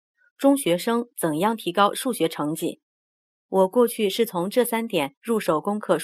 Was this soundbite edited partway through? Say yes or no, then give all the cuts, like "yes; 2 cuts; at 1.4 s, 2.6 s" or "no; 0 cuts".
no; 0 cuts